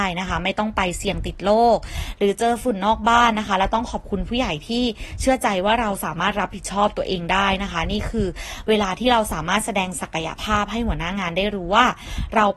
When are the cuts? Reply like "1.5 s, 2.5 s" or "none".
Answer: none